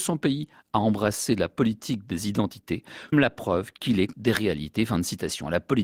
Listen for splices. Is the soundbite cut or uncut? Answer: cut